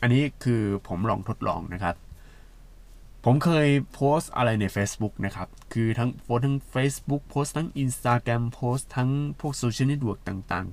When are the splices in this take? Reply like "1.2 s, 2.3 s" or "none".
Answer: none